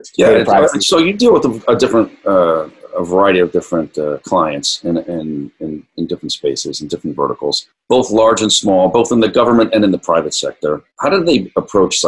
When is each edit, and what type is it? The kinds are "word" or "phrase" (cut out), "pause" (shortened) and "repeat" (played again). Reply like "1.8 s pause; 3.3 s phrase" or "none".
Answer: 7.7 s pause; 10.9 s pause